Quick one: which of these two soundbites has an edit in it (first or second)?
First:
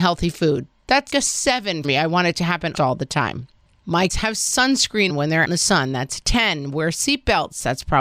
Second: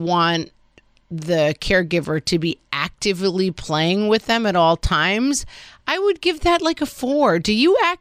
first